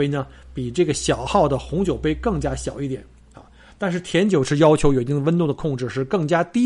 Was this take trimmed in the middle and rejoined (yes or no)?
no